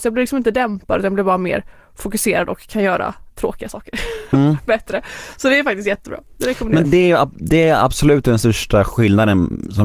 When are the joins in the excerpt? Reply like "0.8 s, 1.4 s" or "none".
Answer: 6.8 s